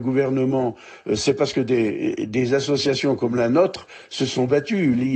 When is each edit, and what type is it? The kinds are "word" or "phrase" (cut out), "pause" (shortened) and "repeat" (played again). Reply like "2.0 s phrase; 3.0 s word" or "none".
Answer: none